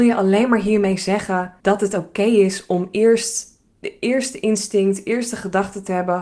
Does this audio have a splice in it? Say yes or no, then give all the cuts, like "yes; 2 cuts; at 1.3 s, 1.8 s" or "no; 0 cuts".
yes; 2 cuts; at 1.6 s, 3.7 s